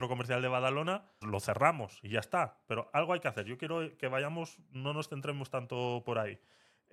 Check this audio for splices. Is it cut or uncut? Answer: cut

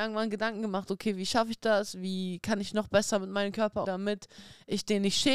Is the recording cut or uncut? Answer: cut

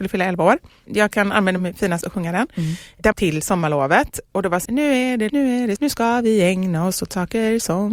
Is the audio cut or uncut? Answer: cut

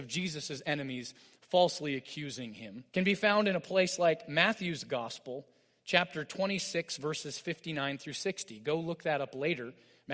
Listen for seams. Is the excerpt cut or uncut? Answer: cut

